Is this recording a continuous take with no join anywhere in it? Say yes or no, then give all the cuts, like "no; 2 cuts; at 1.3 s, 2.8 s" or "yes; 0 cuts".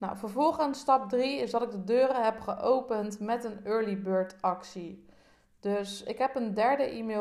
yes; 0 cuts